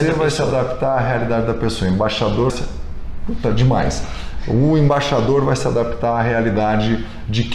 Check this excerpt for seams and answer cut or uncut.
cut